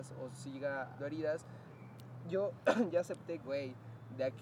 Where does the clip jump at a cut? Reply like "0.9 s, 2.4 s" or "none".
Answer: 1.0 s, 3.4 s

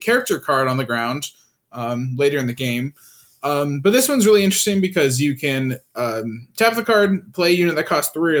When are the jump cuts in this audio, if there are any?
none

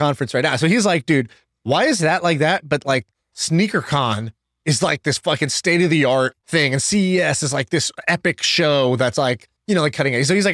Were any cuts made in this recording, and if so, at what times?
6.4 s, 9.6 s

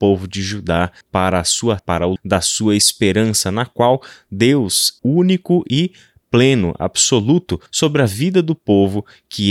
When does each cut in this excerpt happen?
1.0 s, 1.8 s, 2.2 s, 5.0 s, 7.7 s

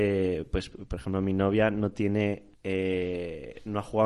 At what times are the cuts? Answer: 2.5 s

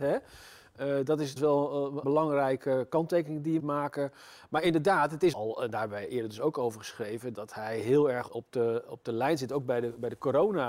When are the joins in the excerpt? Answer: 1.4 s, 2.0 s, 3.6 s, 5.3 s, 7.3 s, 8.3 s

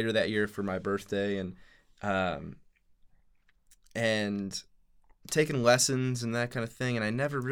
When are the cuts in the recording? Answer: 5.2 s

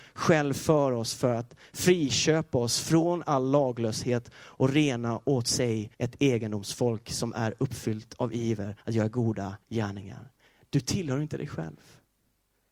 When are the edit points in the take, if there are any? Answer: 5.9 s, 8.8 s, 9.6 s

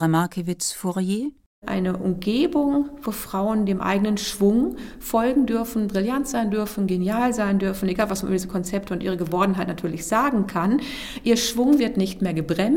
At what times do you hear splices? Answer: none

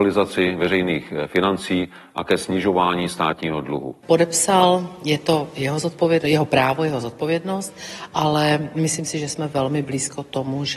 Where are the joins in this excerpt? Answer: none

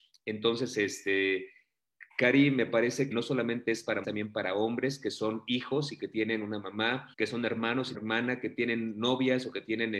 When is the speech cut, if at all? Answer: 2.1 s, 3.1 s, 4.0 s, 7.1 s, 7.9 s

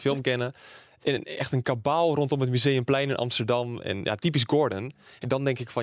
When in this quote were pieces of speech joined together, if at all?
none

